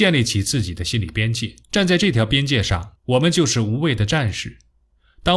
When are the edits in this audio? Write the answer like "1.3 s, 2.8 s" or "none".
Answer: 1.6 s, 3.0 s